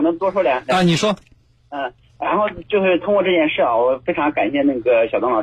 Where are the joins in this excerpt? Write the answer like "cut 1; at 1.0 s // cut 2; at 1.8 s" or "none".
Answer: none